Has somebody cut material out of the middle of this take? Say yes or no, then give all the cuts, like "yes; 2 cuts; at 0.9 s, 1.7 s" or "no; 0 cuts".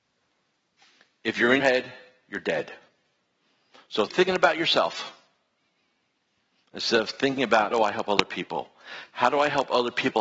yes; 3 cuts; at 1.6 s, 4.1 s, 7.7 s